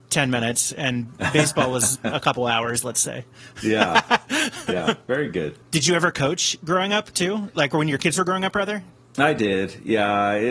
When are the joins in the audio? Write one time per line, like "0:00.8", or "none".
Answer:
0:05.6